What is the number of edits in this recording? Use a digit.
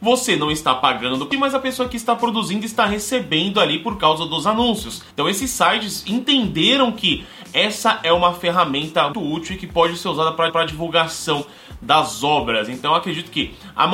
4